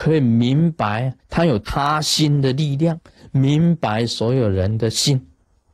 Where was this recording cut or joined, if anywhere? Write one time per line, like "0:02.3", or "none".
0:01.2